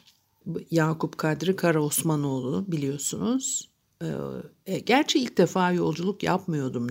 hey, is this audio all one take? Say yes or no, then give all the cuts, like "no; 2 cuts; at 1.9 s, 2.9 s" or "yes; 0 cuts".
yes; 0 cuts